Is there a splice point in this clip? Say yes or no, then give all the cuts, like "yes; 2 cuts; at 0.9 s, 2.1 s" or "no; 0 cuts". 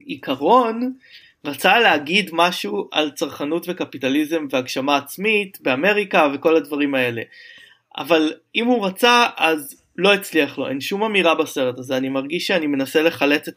no; 0 cuts